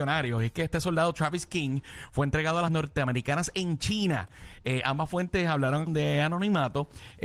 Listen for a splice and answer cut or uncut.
cut